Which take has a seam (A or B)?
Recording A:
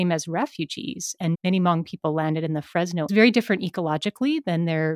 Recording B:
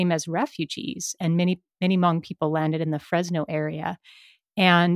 A